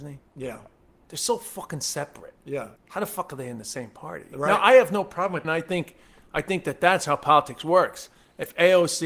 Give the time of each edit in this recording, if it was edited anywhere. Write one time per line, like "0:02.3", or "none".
0:02.8
0:05.4